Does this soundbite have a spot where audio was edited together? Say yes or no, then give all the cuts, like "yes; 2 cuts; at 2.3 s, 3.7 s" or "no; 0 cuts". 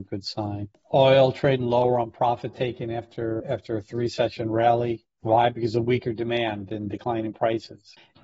yes; 1 cut; at 3.4 s